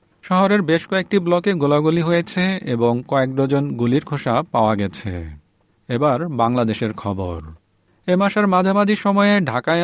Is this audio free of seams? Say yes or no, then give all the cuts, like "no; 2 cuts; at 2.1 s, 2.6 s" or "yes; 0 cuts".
yes; 0 cuts